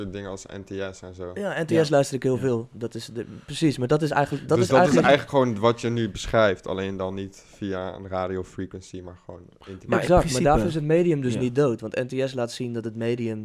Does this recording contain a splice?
no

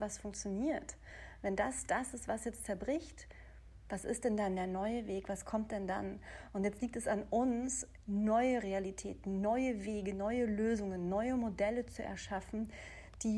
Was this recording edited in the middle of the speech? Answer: yes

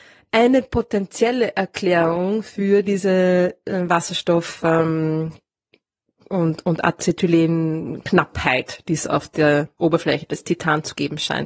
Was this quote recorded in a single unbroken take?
yes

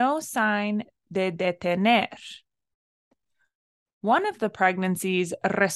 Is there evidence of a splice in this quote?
no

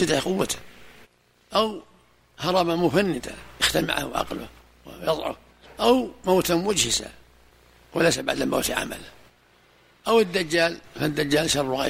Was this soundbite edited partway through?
no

